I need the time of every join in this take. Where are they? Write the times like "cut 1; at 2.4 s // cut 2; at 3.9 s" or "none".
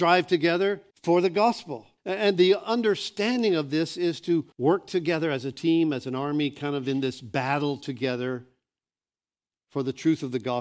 cut 1; at 0.9 s // cut 2; at 2.0 s // cut 3; at 4.5 s